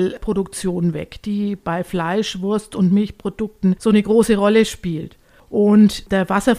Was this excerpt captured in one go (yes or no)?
yes